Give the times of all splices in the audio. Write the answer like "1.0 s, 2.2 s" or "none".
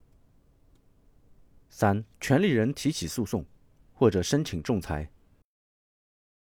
2.1 s

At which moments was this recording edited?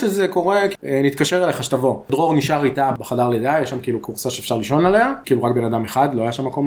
none

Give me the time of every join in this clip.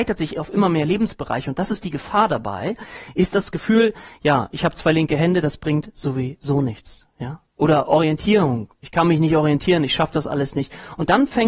none

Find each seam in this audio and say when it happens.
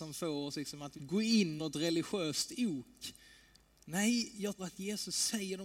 1.0 s, 1.6 s, 4.6 s

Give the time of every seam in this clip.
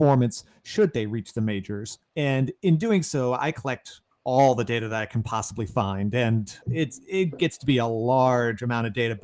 2.1 s, 6.6 s

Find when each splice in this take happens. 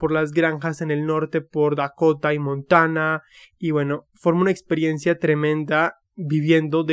none

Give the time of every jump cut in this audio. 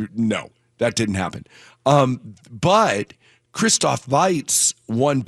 none

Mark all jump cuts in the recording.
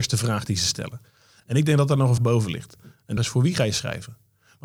2.2 s, 3.2 s

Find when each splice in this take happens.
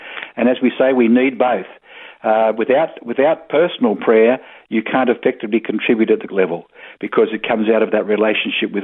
6.3 s

